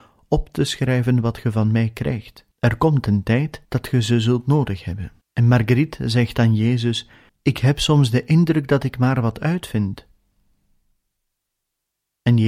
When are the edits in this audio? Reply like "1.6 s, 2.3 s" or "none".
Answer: 2.5 s, 3.6 s, 5.2 s, 7.3 s